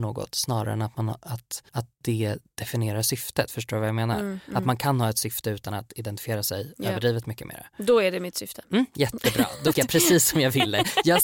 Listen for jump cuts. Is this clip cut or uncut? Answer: cut